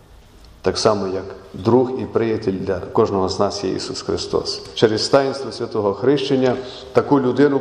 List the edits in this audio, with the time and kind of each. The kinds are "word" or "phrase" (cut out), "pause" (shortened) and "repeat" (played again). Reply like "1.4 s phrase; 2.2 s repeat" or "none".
none